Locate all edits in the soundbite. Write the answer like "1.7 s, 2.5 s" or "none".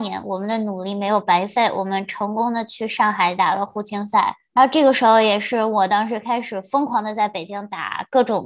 4.4 s